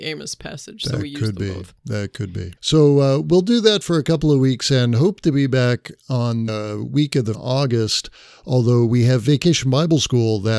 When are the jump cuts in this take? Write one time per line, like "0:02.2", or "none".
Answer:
0:02.6
0:06.5
0:07.3